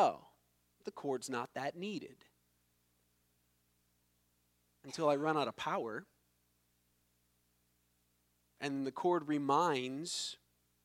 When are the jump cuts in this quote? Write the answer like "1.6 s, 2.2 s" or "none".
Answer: none